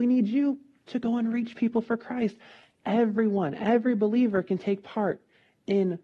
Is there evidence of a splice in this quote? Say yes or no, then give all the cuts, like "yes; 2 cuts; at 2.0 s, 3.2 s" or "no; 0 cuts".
no; 0 cuts